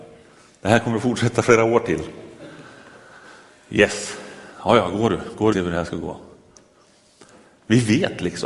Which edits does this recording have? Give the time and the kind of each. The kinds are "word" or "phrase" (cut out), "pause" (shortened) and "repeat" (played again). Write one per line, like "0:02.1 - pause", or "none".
0:05.5 - phrase